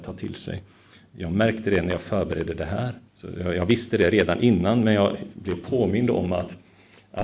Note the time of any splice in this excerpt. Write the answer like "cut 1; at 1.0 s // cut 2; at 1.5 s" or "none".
cut 1; at 3.1 s